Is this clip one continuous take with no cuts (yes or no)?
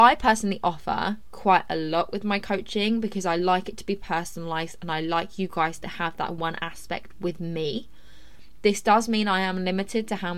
no